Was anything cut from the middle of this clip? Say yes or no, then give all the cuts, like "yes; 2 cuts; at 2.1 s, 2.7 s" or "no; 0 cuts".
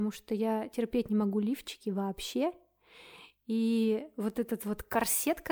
no; 0 cuts